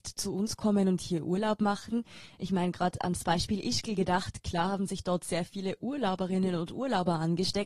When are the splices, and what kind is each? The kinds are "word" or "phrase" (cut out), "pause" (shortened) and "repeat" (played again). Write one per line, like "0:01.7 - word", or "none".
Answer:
none